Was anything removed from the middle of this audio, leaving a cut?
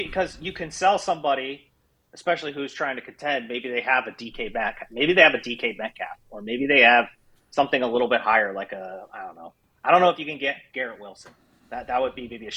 no; 0 cuts

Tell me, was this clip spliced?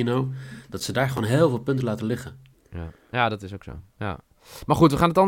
yes; 1 cut; at 2.5 s

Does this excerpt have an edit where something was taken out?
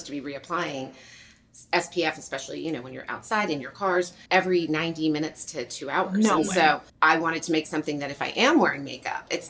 yes; 2 cuts; at 4.3 s, 6.9 s

